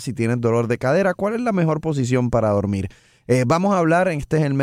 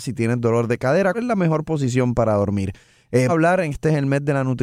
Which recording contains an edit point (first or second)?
second